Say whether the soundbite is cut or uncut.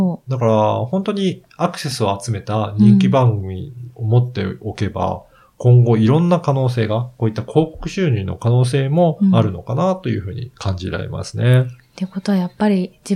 uncut